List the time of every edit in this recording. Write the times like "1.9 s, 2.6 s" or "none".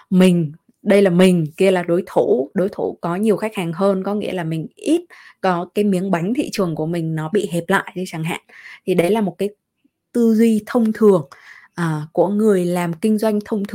none